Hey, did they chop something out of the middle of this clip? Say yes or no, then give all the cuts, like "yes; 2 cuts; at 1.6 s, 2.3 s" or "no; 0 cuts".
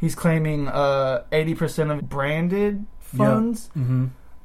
yes; 1 cut; at 2.0 s